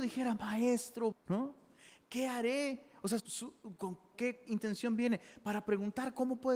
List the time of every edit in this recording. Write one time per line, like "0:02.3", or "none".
0:01.1
0:03.2
0:04.1